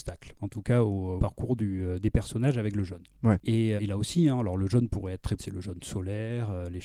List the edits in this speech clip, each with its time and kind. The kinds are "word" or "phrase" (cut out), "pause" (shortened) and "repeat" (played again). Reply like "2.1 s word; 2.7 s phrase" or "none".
1.2 s word; 3.8 s word; 5.4 s word